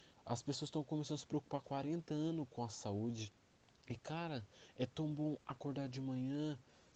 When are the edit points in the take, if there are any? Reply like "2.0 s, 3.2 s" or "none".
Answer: 1.6 s